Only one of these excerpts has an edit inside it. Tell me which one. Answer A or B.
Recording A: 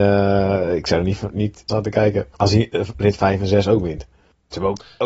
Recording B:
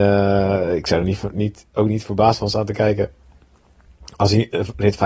A